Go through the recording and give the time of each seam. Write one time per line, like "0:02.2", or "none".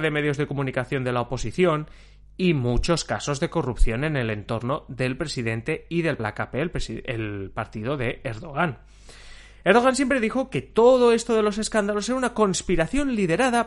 0:06.2